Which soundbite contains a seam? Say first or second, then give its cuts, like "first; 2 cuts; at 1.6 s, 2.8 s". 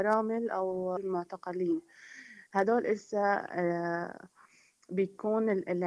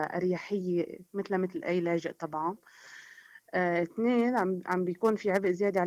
first; 1 cut; at 1.0 s